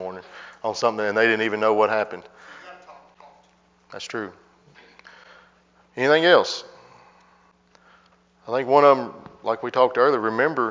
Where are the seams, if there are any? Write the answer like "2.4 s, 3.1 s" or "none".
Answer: none